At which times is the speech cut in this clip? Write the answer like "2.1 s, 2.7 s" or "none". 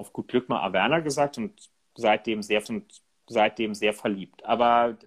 2.6 s